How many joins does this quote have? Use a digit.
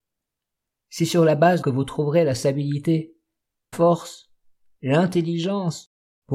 2